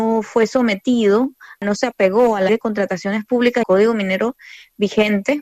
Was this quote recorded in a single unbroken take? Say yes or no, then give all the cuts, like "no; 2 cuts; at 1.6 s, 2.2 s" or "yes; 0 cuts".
no; 2 cuts; at 2.5 s, 3.6 s